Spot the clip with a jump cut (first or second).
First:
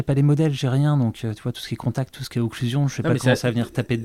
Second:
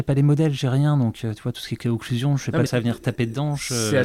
second